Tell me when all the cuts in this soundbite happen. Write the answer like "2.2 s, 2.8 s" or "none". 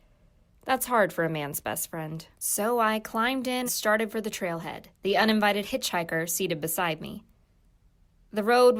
2.3 s, 3.7 s, 4.9 s

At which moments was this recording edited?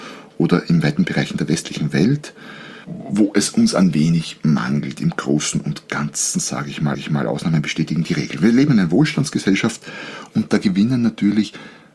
2.8 s, 6.9 s

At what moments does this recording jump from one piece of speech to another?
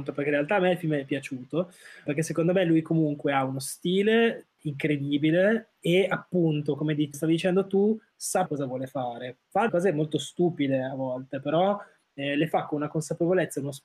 2.1 s, 7.1 s, 8.5 s, 9.7 s

